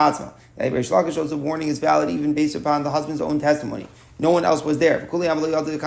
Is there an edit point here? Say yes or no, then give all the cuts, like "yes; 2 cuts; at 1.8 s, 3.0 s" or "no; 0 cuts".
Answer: no; 0 cuts